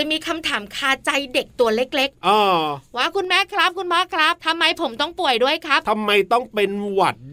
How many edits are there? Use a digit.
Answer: 1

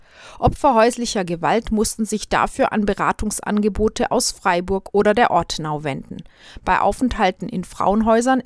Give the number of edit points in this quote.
0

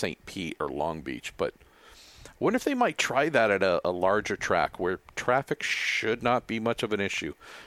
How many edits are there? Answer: 0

